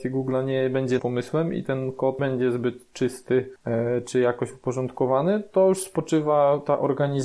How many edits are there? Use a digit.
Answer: 2